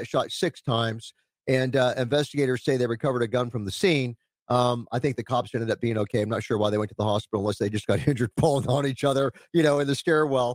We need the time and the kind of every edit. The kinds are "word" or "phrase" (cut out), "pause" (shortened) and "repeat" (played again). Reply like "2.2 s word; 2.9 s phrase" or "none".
none